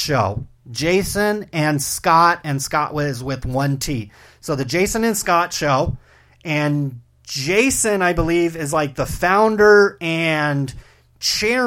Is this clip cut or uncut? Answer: uncut